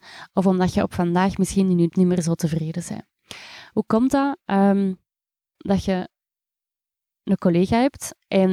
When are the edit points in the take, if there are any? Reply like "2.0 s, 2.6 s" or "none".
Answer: 1.9 s, 5.6 s

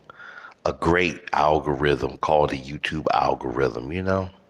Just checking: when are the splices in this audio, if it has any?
none

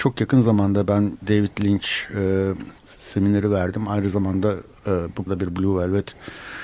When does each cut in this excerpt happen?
1.2 s, 2.8 s, 5.3 s

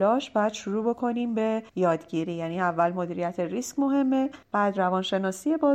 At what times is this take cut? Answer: 1.7 s, 4.4 s

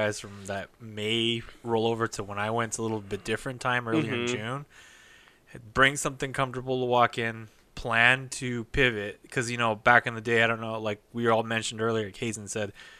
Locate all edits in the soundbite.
none

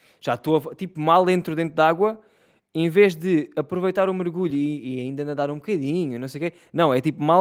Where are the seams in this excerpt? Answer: none

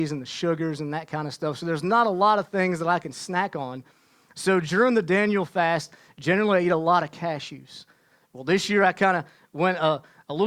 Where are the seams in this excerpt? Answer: none

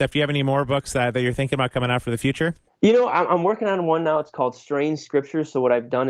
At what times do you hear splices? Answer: 2.7 s

